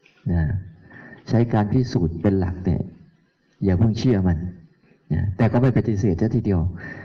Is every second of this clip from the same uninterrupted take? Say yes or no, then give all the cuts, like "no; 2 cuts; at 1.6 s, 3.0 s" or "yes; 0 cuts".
yes; 0 cuts